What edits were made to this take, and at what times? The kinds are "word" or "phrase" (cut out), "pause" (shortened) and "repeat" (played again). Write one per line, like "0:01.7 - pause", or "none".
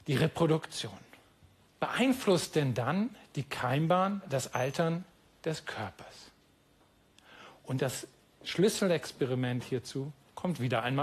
none